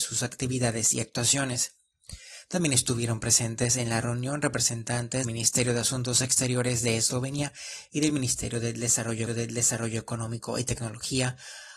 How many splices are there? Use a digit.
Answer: 2